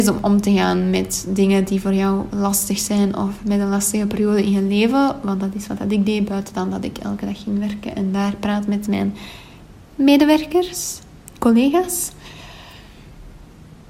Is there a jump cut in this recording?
no; 0 cuts

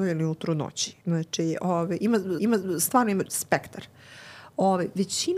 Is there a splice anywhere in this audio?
yes; 2 cuts; at 1.0 s, 2.4 s

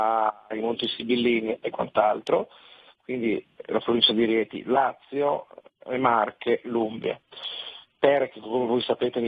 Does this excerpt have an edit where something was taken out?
no; 0 cuts

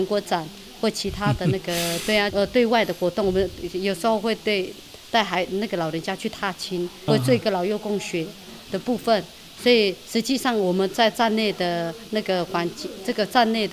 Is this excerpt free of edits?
no; 2 cuts; at 2.3 s, 7.1 s

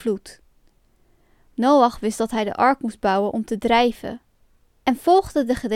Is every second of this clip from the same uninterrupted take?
yes; 0 cuts

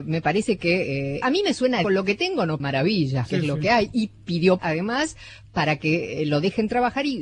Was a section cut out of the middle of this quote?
yes; 5 cuts; at 1.2 s, 1.8 s, 2.6 s, 3.3 s, 4.6 s

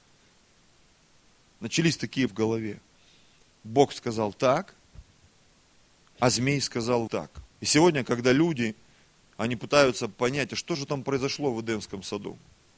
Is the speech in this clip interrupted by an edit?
yes; 3 cuts; at 2.3 s, 7.1 s, 7.5 s

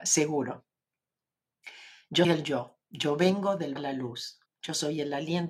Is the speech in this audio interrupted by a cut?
yes; 4 cuts; at 2.2 s, 2.8 s, 3.8 s, 4.5 s

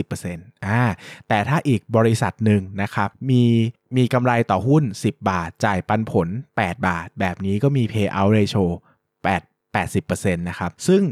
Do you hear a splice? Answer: no; 0 cuts

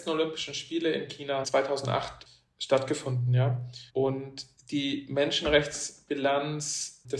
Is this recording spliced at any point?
yes; 2 cuts; at 1.4 s, 3.9 s

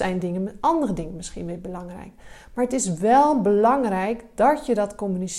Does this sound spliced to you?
no; 0 cuts

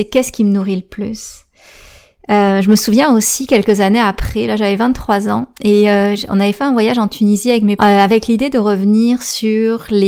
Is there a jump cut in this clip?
yes; 1 cut; at 7.8 s

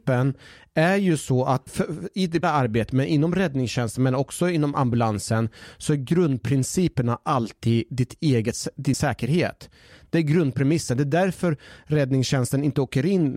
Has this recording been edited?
yes; 3 cuts; at 1.7 s, 2.4 s, 8.9 s

